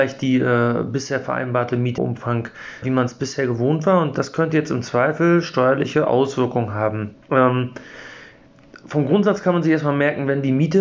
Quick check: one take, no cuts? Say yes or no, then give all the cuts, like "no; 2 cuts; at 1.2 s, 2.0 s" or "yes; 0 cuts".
no; 3 cuts; at 2.0 s, 2.8 s, 7.2 s